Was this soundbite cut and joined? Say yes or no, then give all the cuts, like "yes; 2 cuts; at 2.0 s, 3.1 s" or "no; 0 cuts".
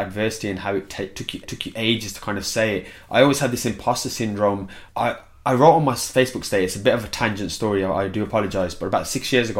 yes; 2 cuts; at 1.4 s, 4.9 s